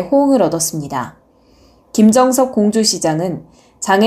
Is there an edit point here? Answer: no; 0 cuts

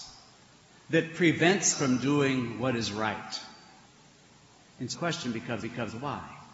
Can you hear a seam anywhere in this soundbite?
yes; 4 cuts; at 1.7 s, 3.9 s, 4.9 s, 5.6 s

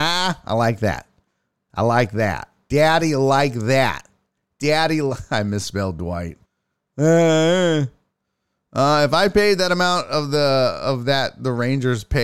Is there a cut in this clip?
yes; 1 cut; at 6.5 s

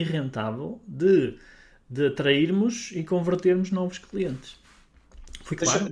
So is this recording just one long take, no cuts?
yes; 0 cuts

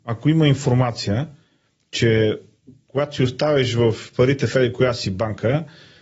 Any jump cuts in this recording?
no; 0 cuts

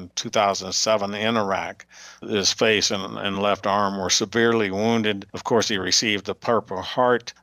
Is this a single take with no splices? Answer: yes; 0 cuts

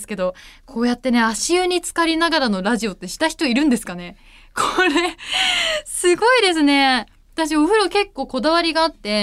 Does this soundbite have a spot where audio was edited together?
no; 0 cuts

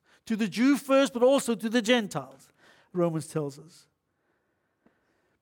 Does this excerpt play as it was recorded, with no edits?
yes; 0 cuts

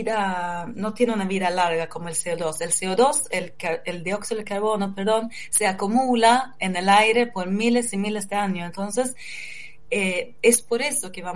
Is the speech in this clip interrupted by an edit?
no; 0 cuts

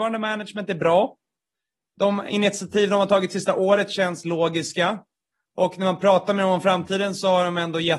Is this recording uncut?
yes; 0 cuts

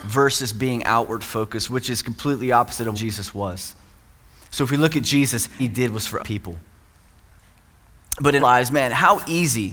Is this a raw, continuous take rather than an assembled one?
no; 4 cuts; at 2.9 s, 5.6 s, 6.2 s, 8.4 s

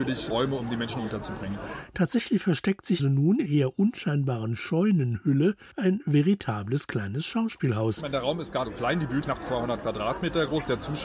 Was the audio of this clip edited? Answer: yes; 5 cuts; at 3.0 s, 3.5 s, 5.7 s, 8.6 s, 9.2 s

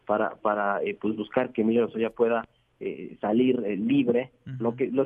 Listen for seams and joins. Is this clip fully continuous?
yes; 0 cuts

